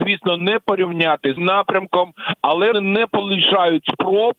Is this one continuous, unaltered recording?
no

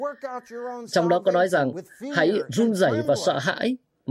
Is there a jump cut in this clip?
no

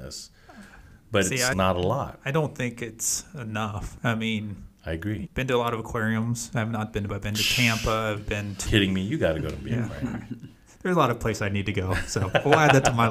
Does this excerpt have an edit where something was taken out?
yes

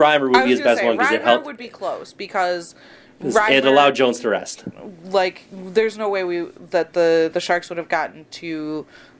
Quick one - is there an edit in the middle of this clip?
no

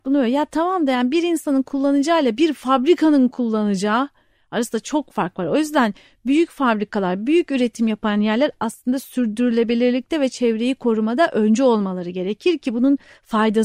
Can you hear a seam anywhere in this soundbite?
no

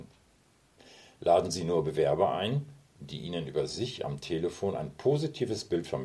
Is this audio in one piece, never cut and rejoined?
yes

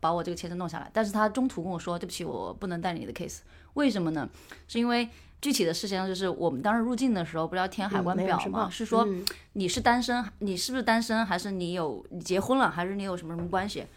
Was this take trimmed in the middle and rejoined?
yes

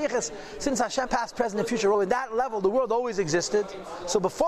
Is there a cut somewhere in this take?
yes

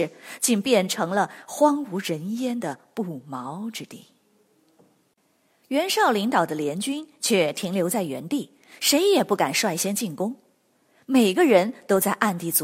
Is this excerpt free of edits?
yes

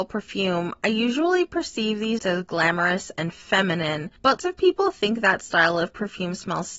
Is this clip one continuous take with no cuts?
no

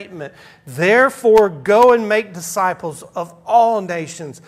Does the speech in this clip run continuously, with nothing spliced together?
yes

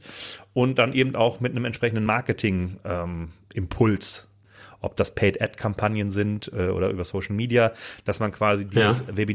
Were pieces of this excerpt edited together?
no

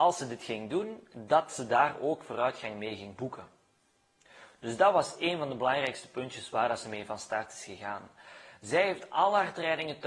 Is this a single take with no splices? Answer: yes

